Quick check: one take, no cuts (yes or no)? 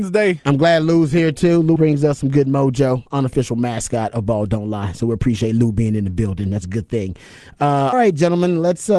no